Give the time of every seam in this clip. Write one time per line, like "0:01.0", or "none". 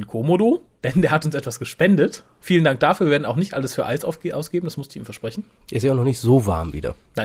none